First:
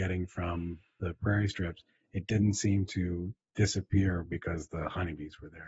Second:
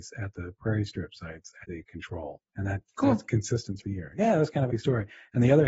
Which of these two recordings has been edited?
second; 4 cuts; at 1.6 s, 2.5 s, 3.8 s, 4.7 s

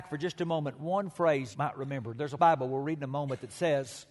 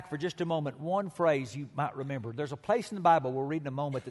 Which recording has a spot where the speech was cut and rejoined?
first; 2 cuts; at 1.5 s, 2.4 s

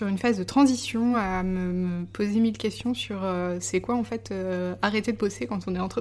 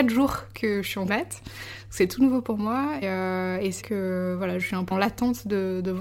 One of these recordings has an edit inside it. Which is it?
second; 5 cuts; at 1.1 s, 3.0 s, 3.8 s, 4.6 s, 4.9 s

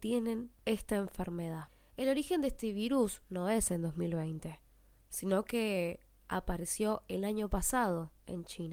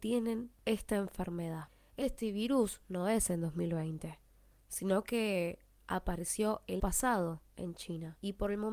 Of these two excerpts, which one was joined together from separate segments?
second; 2 cuts; at 2.0 s, 6.8 s

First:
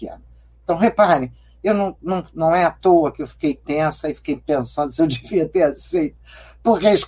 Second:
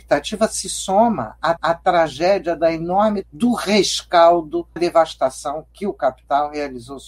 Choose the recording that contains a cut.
second; 3 cuts; at 1.6 s, 3.2 s, 4.8 s

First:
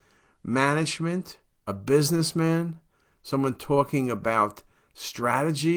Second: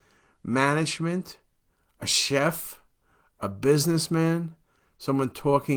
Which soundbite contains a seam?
first; 1 cut; at 1.7 s

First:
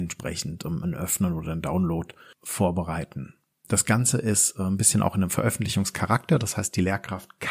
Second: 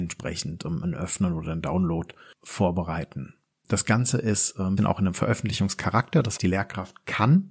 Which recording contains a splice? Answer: second; 2 cuts; at 4.8 s, 6.4 s

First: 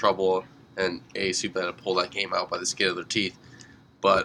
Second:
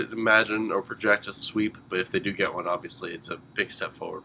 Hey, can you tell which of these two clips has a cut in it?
first; 1 cut; at 1.5 s

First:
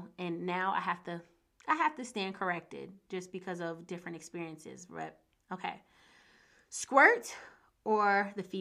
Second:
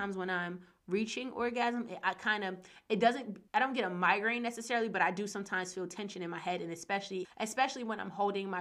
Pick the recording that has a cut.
second; 2 cuts; at 3.5 s, 7.2 s

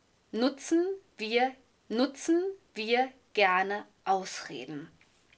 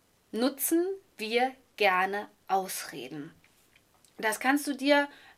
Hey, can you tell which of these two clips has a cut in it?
first; 1 cut; at 1.7 s

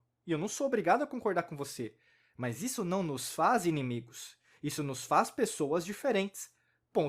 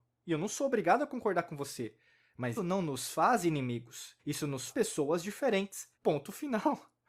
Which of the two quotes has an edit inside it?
second; 4 cuts; at 2.6 s, 4.2 s, 4.7 s, 5.9 s

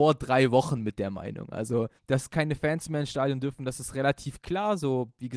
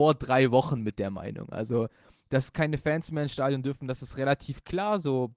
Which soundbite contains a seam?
first; 1 cut; at 2.0 s

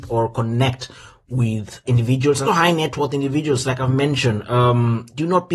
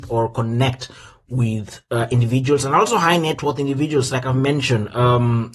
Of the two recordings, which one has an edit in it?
first; 2 cuts; at 1.9 s, 2.5 s

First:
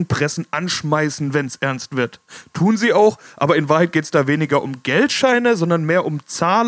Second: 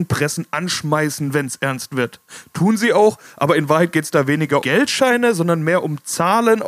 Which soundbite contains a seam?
second; 1 cut; at 4.6 s

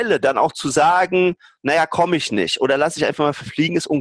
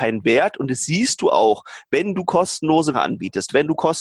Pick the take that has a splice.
second; 1 cut; at 2.9 s

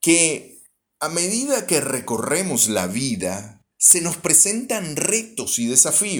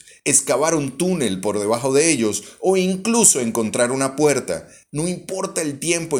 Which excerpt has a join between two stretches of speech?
first; 1 cut; at 3.7 s

